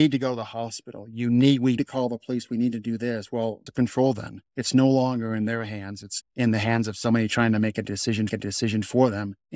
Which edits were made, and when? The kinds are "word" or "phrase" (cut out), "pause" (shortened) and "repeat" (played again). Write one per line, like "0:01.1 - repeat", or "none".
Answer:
0:01.8 - word
0:03.7 - phrase
0:04.5 - pause
0:06.2 - word
0:08.3 - repeat